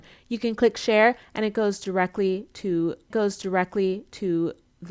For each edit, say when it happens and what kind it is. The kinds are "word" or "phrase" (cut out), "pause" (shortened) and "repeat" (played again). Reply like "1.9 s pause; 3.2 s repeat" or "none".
3.1 s repeat